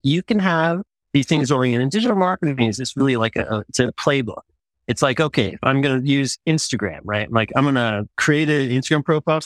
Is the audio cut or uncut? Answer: uncut